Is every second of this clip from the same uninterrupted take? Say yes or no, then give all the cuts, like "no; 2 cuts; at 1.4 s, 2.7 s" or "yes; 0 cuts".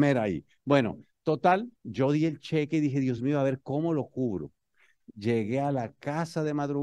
yes; 0 cuts